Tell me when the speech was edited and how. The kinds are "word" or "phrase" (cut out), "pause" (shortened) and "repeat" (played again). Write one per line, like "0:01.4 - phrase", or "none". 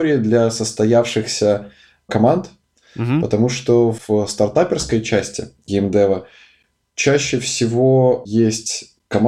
none